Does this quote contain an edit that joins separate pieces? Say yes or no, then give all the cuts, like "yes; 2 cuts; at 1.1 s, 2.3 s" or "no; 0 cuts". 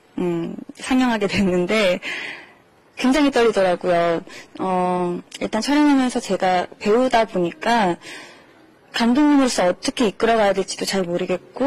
no; 0 cuts